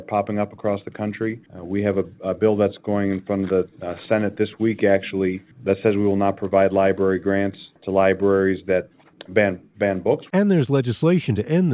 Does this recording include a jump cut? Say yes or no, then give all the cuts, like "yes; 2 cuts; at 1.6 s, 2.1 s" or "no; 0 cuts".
yes; 3 cuts; at 1.5 s, 5.5 s, 7.8 s